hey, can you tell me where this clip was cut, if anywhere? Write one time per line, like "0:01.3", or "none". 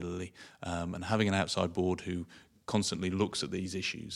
none

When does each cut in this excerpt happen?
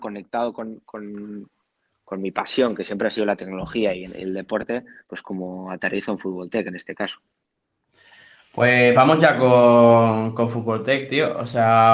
none

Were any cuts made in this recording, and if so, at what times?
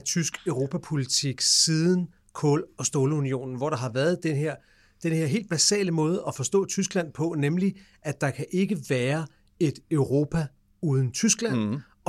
none

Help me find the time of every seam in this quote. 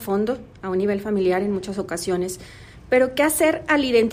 none

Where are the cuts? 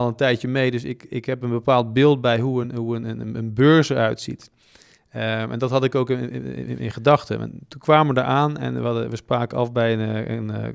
none

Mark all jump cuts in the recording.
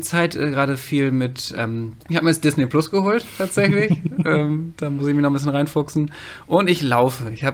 0:02.0

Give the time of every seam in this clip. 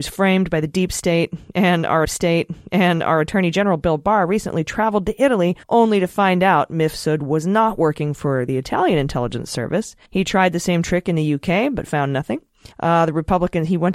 0:02.0
0:05.6
0:10.1
0:12.7

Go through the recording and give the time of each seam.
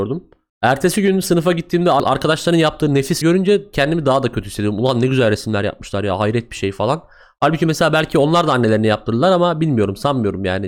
0:03.2

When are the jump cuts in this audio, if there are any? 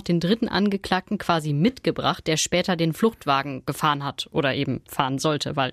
none

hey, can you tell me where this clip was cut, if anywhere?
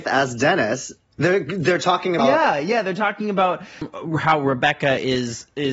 0:02.2

